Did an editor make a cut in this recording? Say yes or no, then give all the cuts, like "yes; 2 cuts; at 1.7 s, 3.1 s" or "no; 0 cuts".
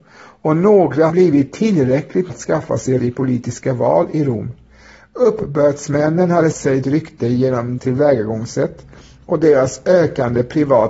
yes; 6 cuts; at 1.1 s, 2.3 s, 3.0 s, 6.5 s, 6.8 s, 7.8 s